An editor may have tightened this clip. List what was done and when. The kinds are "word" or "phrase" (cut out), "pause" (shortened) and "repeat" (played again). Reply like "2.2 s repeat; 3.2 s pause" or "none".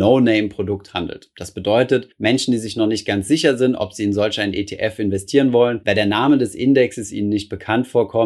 2.1 s pause